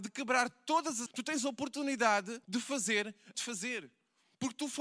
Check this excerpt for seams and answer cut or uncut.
cut